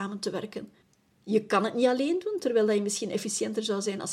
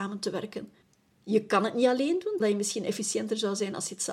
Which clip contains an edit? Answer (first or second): second